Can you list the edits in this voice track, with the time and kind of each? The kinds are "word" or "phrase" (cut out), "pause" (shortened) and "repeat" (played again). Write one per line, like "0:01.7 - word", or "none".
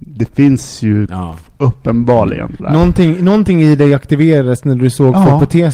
0:02.6 - word